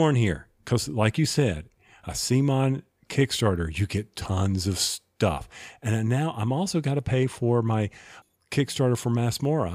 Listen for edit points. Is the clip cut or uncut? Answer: uncut